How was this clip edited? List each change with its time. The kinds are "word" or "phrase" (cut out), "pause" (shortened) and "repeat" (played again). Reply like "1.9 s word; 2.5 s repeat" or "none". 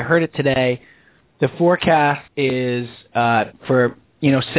2.3 s pause

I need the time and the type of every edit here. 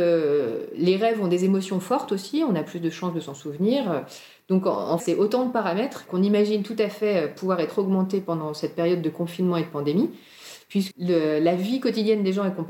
5.0 s word; 10.9 s word

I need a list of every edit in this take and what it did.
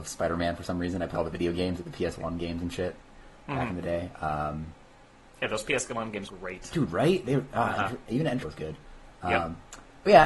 1.1 s word; 6.2 s word; 8.4 s word

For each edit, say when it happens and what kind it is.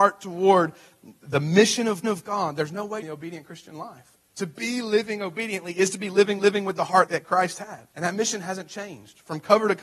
2.0 s repeat; 3.0 s phrase; 4.1 s pause; 6.4 s repeat; 7.1 s word; 7.9 s pause

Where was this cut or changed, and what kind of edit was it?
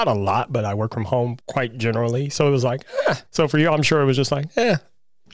1.4 s pause; 3.3 s pause

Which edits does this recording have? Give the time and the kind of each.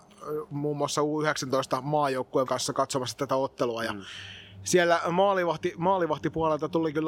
2.5 s word

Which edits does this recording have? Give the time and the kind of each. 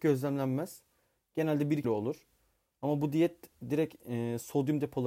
1.8 s word

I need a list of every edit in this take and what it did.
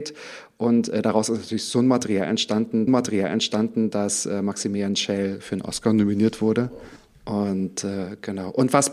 2.9 s repeat; 7.0 s pause

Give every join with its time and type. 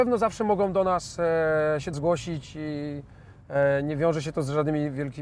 1.9 s word

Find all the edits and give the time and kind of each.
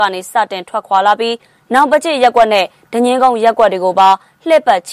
none

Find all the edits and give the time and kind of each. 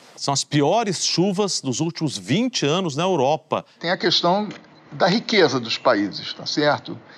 none

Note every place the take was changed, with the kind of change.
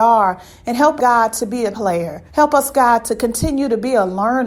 1.0 s word; 1.7 s word; 2.3 s pause

